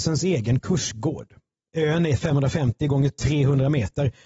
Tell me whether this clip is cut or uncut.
uncut